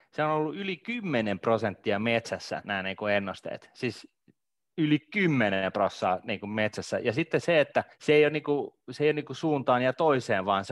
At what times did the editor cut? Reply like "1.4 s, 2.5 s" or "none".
2.6 s, 7.9 s